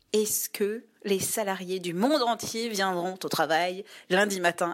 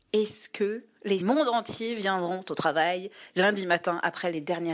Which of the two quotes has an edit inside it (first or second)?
second